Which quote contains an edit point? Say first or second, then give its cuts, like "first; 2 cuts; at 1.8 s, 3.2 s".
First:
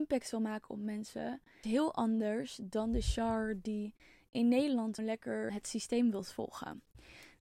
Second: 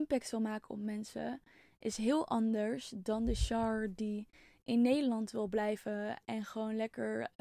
first; 3 cuts; at 1.6 s, 5.0 s, 5.5 s